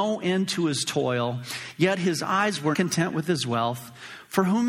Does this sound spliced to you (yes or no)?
yes